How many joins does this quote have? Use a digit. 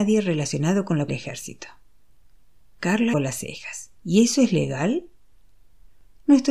3